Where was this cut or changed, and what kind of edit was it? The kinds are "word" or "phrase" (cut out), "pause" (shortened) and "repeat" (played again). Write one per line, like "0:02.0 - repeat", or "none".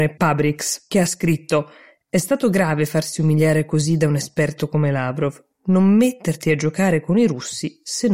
none